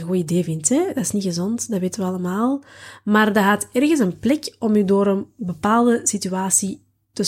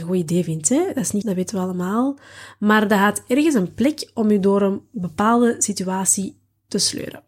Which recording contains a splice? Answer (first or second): second